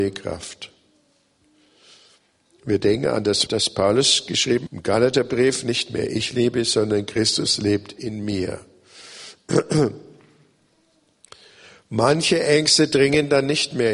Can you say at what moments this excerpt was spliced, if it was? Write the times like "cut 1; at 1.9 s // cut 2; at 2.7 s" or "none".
cut 1; at 3.5 s // cut 2; at 4.7 s